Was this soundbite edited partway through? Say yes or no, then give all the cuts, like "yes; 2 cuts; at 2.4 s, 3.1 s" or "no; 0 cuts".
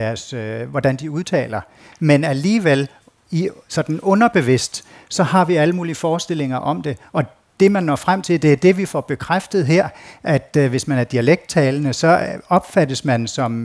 no; 0 cuts